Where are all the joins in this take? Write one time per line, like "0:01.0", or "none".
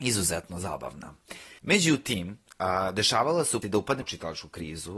0:01.6
0:03.6
0:04.0